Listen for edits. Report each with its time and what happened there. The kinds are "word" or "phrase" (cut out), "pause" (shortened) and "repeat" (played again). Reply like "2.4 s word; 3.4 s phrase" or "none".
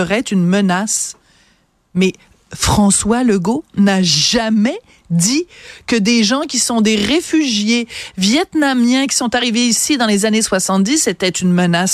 none